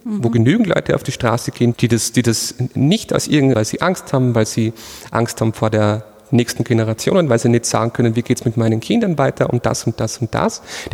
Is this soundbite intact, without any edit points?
no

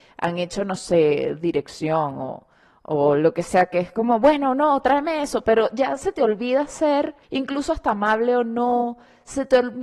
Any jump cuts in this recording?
yes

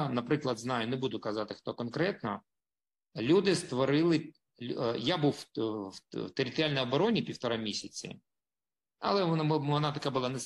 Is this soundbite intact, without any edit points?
yes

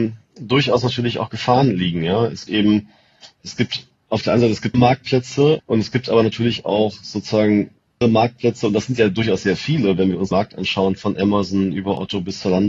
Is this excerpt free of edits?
no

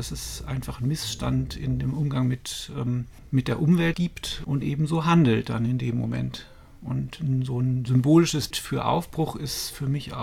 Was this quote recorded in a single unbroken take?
no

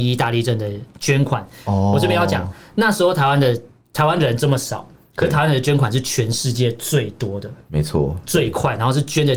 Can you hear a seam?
no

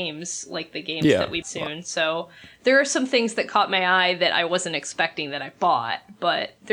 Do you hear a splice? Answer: yes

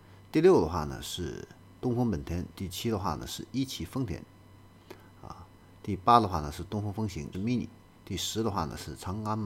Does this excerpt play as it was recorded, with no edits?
no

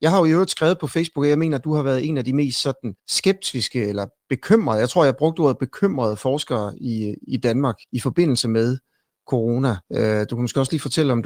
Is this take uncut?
no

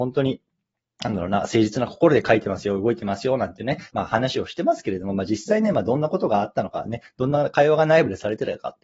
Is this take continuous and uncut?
no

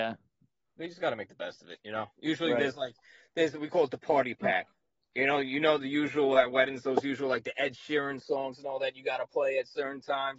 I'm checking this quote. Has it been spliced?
no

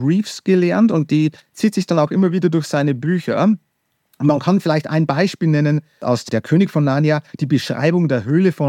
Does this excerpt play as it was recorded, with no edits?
yes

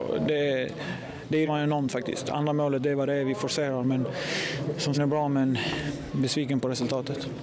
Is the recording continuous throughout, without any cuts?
no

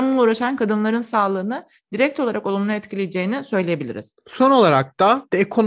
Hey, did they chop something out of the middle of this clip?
no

